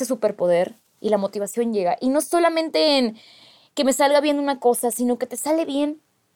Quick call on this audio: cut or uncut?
uncut